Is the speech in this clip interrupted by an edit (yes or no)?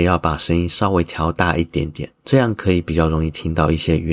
yes